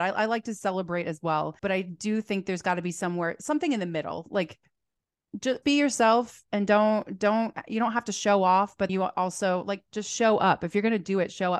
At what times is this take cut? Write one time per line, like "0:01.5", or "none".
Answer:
0:01.6
0:05.6
0:08.9